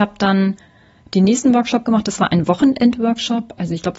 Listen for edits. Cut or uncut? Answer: uncut